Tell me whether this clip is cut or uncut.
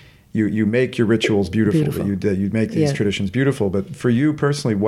uncut